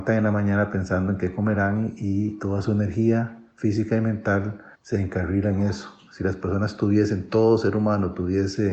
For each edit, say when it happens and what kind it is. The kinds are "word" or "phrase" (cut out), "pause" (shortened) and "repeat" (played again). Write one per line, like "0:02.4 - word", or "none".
0:04.7 - pause

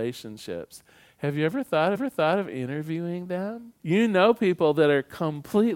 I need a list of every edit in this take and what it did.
0:01.9 - repeat
0:03.8 - pause

